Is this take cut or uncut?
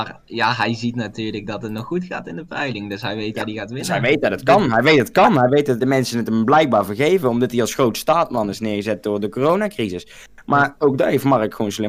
cut